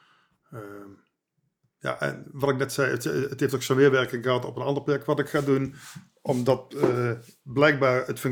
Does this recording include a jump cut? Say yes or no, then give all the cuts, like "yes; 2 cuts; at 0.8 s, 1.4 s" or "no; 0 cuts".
no; 0 cuts